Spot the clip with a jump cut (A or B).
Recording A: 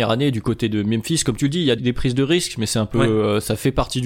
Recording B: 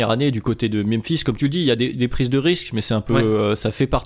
A